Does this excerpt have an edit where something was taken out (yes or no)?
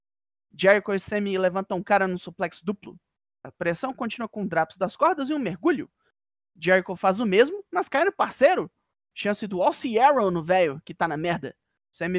no